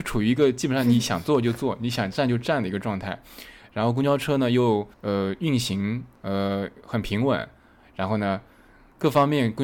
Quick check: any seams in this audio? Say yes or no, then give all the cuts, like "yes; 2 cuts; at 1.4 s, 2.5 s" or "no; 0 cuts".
yes; 2 cuts; at 4.9 s, 6.1 s